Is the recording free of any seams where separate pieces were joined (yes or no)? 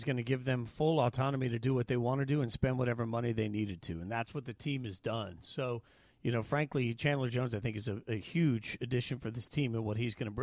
yes